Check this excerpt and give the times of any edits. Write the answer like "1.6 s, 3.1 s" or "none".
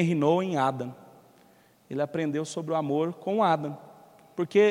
none